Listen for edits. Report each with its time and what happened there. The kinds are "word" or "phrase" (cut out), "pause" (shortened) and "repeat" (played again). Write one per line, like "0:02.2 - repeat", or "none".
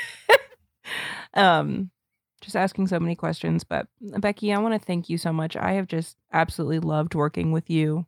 none